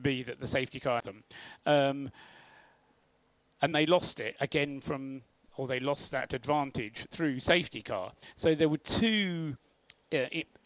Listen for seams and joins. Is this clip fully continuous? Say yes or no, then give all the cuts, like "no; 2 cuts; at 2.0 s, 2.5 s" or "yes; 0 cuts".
no; 2 cuts; at 1.0 s, 3.7 s